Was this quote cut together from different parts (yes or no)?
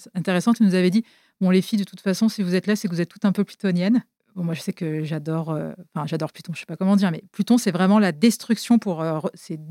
no